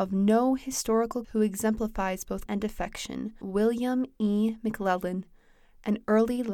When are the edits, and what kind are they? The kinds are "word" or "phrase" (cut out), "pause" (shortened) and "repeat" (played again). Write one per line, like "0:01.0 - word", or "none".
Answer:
0:01.2 - word
0:02.5 - word
0:03.4 - phrase